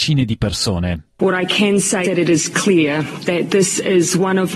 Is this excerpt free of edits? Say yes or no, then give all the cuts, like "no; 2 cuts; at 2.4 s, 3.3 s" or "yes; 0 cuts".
no; 2 cuts; at 1.1 s, 2.0 s